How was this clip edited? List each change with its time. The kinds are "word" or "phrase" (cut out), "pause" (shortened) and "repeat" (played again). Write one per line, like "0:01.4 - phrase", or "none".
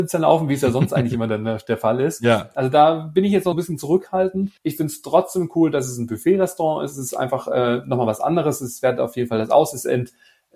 0:03.5 - word
0:04.6 - pause